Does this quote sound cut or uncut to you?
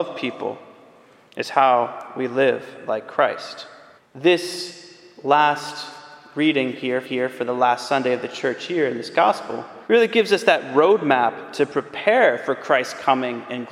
cut